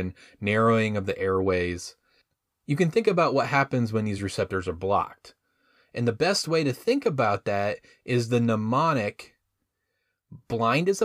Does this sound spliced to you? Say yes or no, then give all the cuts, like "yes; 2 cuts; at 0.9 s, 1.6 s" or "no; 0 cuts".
no; 0 cuts